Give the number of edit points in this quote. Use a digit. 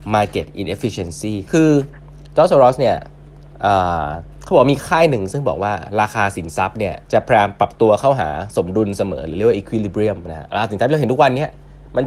2